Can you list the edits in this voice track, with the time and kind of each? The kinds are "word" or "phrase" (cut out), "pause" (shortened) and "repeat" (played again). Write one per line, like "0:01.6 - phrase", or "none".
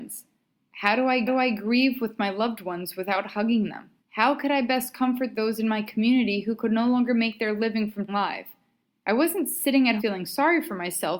0:01.3 - repeat
0:04.0 - pause
0:08.1 - phrase
0:10.0 - word